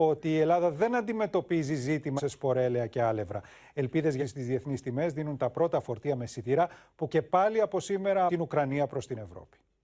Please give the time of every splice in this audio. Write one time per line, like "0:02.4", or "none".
0:02.2
0:04.2
0:07.1
0:08.3